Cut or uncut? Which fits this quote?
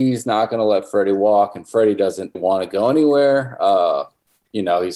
cut